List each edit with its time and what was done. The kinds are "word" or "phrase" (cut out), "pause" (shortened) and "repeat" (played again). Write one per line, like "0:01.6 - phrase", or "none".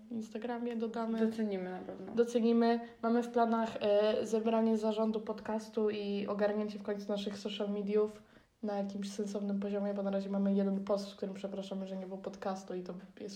0:08.4 - pause